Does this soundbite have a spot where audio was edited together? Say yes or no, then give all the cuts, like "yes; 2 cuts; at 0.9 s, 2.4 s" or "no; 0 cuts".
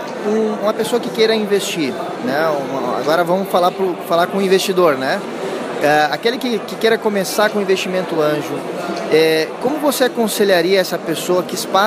no; 0 cuts